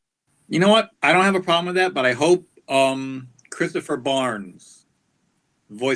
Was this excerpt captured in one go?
no; 1 cut; at 0.9 s

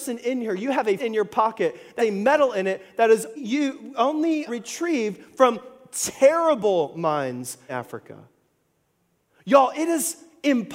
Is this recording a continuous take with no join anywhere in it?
no; 5 cuts; at 1.0 s, 2.0 s, 3.4 s, 4.5 s, 7.7 s

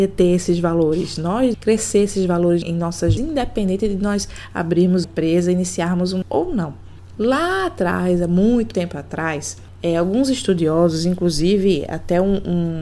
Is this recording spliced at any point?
yes; 6 cuts; at 1.5 s, 2.6 s, 3.2 s, 5.0 s, 6.2 s, 8.7 s

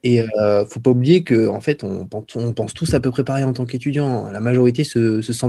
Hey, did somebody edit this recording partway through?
no; 0 cuts

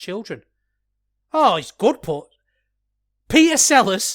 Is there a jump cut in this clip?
no; 0 cuts

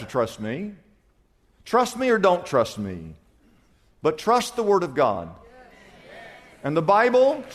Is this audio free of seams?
yes; 0 cuts

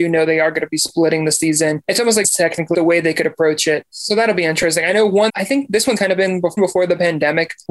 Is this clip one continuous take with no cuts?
no; 5 cuts; at 2.2 s, 2.7 s, 5.3 s, 6.0 s, 6.6 s

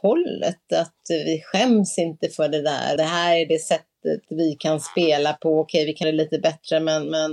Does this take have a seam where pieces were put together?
yes; 3 cuts; at 3.0 s, 4.2 s, 6.0 s

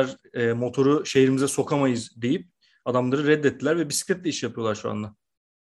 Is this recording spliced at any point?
no; 0 cuts

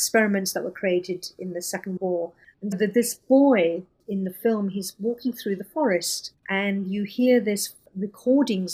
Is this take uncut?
no; 3 cuts; at 2.0 s, 2.7 s, 6.4 s

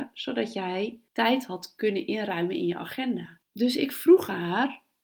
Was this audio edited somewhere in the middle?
yes; 2 cuts; at 1.1 s, 3.4 s

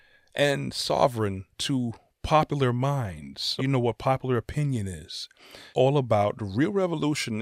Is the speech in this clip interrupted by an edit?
yes; 3 cuts; at 1.5 s, 3.6 s, 5.7 s

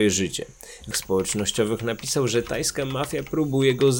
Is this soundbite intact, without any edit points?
no; 1 cut; at 0.9 s

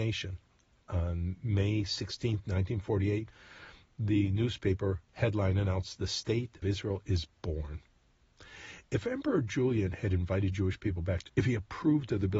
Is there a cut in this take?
yes; 2 cuts; at 6.6 s, 11.3 s

